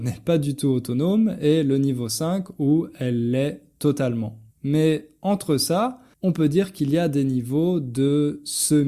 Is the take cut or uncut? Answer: cut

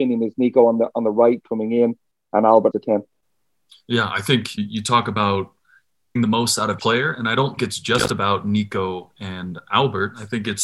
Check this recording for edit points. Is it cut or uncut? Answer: cut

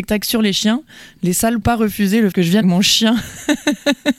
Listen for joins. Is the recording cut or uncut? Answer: cut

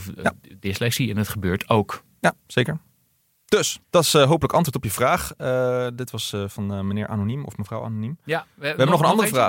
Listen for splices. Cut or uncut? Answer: cut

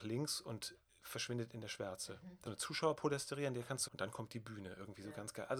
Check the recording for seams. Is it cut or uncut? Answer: cut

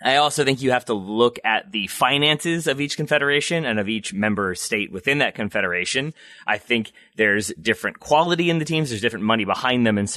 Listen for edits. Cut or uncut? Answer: uncut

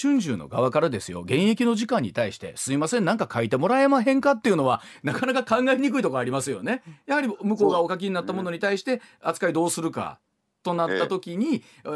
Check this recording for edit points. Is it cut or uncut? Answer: uncut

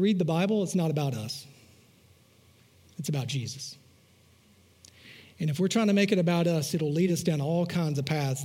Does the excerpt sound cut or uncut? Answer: uncut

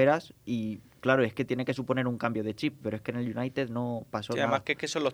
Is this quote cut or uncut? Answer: uncut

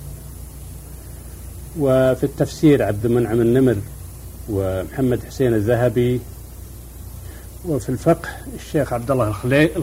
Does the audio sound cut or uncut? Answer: uncut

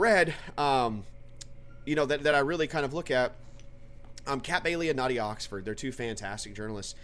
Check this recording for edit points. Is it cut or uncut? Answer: uncut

